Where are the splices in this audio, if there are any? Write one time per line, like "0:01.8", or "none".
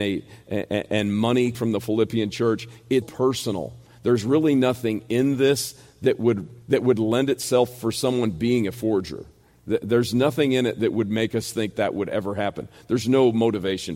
0:01.5
0:03.0
0:06.6
0:11.7